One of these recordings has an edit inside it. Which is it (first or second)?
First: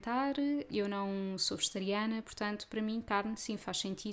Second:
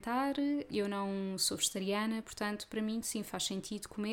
second